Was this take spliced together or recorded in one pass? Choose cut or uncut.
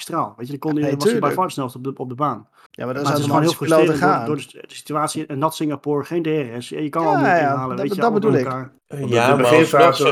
cut